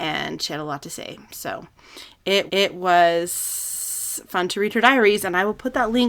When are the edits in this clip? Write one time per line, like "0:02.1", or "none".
0:02.5